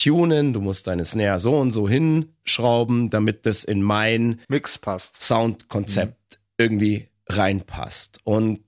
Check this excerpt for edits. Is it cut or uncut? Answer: cut